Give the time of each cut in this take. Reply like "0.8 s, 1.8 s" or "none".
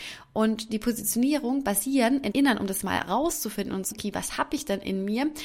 2.3 s, 2.8 s, 3.9 s